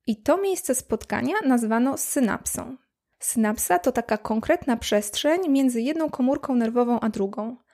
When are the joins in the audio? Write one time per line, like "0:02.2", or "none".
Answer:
none